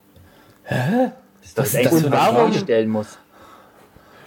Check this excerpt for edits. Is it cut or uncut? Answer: uncut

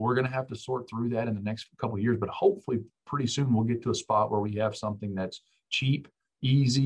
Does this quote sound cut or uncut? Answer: uncut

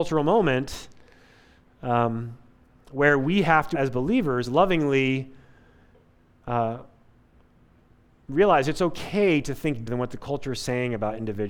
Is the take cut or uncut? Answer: cut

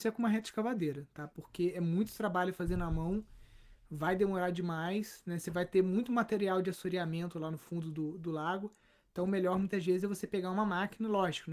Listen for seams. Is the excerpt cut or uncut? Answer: uncut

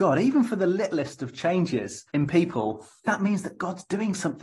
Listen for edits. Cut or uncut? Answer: cut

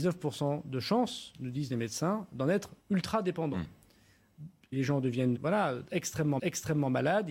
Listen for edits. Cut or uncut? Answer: cut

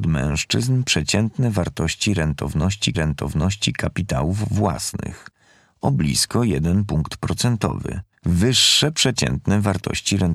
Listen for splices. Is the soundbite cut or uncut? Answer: cut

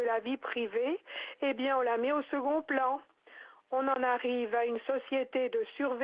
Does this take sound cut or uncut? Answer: uncut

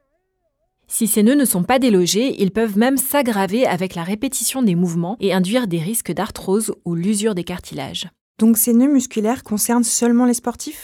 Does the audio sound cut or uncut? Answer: uncut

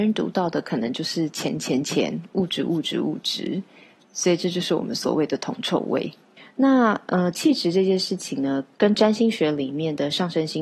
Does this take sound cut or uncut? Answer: uncut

